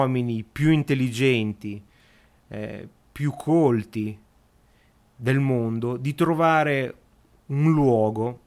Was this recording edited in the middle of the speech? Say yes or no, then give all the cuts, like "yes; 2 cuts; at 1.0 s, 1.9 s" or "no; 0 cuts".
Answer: no; 0 cuts